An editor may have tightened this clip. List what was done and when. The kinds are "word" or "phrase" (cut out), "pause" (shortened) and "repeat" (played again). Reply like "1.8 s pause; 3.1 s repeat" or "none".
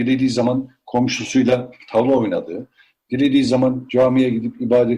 none